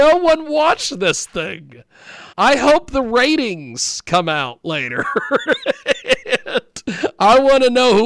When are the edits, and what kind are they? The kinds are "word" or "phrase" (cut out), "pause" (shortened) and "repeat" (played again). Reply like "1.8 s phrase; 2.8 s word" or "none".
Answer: 2.3 s pause